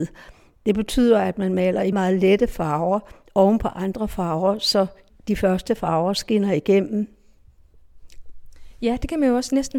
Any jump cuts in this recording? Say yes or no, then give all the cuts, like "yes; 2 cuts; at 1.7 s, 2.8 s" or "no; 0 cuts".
yes; 2 cuts; at 1.9 s, 5.1 s